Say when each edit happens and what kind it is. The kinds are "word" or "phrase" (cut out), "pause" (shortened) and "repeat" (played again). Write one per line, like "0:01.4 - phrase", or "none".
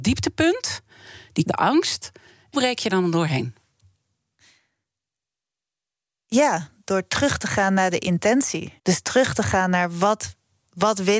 0:01.4 - word
0:02.5 - word
0:02.9 - word
0:08.8 - pause